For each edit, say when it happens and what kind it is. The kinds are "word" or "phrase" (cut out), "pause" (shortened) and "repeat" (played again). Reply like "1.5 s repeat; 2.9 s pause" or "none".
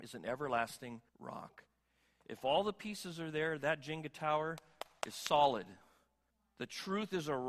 1.1 s pause; 6.3 s pause